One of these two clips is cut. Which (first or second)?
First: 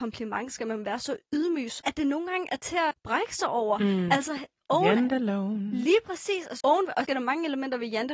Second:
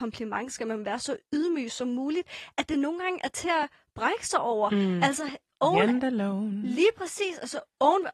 first